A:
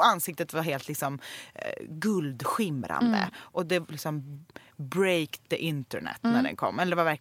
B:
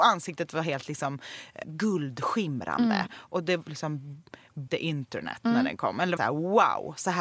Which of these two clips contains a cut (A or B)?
B